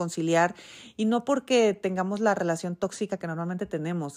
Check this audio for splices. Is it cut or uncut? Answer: uncut